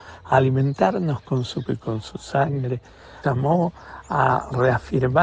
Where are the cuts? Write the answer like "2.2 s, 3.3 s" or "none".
1.7 s, 3.2 s